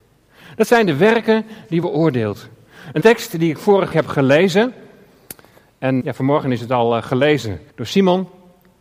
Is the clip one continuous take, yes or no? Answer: no